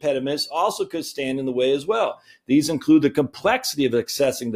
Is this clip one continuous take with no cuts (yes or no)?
yes